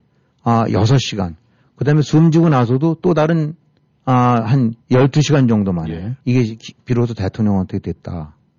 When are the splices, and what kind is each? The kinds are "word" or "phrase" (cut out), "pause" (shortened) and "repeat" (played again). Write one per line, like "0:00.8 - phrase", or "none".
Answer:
0:04.8 - pause
0:06.2 - pause

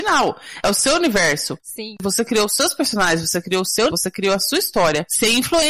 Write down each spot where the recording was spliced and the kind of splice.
0:03.9 - word

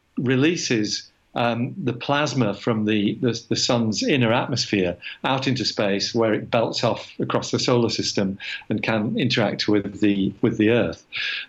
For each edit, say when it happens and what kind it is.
none

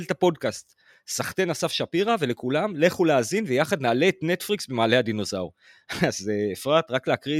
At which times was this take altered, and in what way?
none

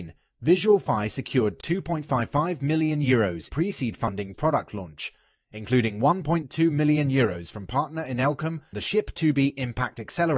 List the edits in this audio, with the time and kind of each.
0:03.5 - word
0:04.3 - word
0:08.7 - word

